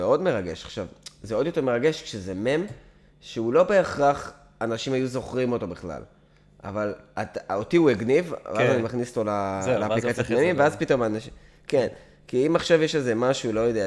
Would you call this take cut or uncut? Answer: uncut